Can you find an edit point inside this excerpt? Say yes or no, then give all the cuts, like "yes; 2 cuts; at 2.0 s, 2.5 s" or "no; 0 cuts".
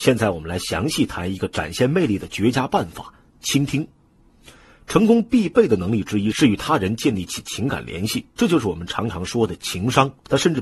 no; 0 cuts